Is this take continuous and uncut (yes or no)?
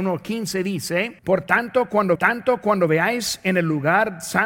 no